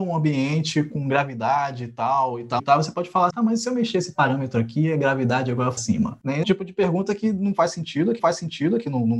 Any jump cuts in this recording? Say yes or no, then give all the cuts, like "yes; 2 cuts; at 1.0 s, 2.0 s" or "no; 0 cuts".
yes; 5 cuts; at 2.6 s, 3.3 s, 5.8 s, 6.4 s, 8.2 s